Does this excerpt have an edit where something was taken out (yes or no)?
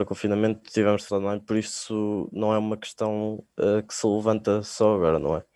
yes